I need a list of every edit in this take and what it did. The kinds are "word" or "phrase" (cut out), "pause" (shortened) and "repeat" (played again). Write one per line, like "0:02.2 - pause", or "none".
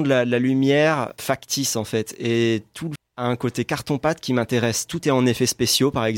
0:01.2 - word
0:03.0 - word